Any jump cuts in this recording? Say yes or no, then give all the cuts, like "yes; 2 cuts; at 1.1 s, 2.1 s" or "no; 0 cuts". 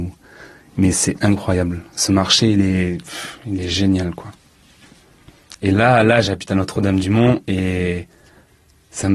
no; 0 cuts